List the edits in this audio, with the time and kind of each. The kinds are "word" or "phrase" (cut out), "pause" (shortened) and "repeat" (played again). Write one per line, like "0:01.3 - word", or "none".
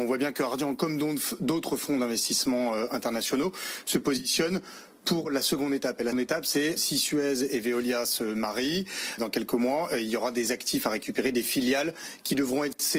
0:06.1 - word
0:06.8 - word
0:09.2 - word